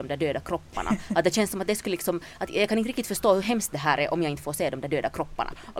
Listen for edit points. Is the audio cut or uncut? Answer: uncut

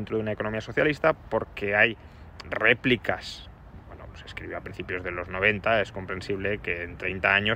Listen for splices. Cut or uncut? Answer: cut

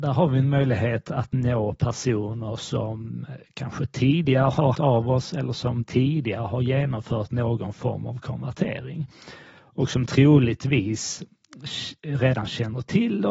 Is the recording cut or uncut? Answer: cut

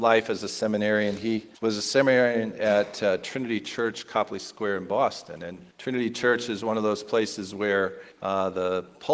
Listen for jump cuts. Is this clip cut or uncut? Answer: cut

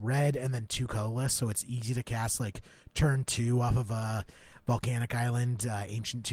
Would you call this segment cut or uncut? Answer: uncut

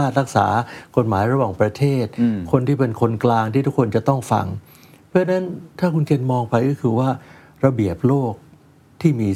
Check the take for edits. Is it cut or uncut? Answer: uncut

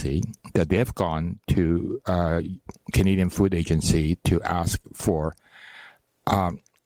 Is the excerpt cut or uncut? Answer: uncut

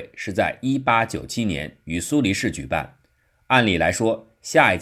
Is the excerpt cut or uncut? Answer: uncut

